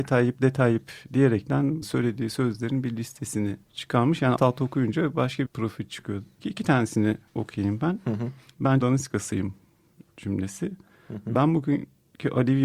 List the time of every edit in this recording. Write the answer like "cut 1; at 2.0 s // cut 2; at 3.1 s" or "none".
cut 1; at 1.8 s // cut 2; at 3.6 s // cut 3; at 4.4 s // cut 4; at 5.5 s // cut 5; at 6.4 s // cut 6; at 7.3 s // cut 7; at 8.8 s